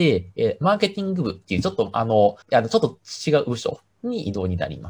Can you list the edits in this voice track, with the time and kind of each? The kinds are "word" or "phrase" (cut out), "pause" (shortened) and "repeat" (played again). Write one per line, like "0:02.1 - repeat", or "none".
0:02.4 - pause